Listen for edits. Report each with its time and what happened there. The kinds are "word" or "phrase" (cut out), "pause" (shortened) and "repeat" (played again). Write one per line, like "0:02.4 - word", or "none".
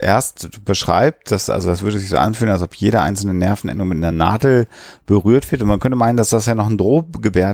none